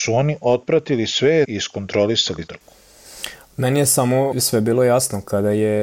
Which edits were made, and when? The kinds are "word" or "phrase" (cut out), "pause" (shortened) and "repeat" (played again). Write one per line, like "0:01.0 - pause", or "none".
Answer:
0:01.4 - word
0:02.5 - word
0:04.3 - word